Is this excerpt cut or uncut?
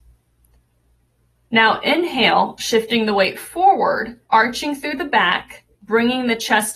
cut